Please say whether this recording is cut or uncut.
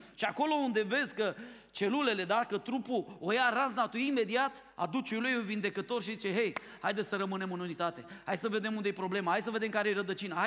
cut